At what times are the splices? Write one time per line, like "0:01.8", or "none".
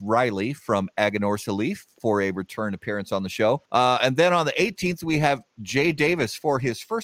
0:03.7